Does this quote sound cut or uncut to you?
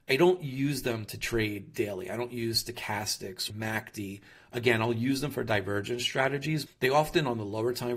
cut